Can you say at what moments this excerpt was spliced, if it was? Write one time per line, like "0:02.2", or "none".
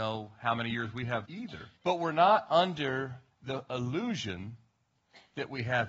0:01.2
0:01.8
0:03.3